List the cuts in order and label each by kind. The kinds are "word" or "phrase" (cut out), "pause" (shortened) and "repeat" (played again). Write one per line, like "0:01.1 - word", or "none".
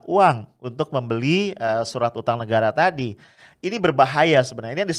none